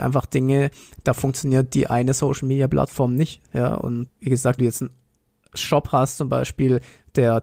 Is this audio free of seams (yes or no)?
no